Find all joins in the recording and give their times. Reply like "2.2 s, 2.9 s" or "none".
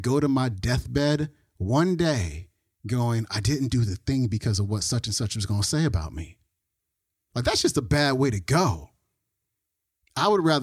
none